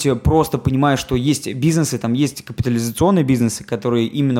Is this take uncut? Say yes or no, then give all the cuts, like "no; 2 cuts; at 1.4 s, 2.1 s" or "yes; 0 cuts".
yes; 0 cuts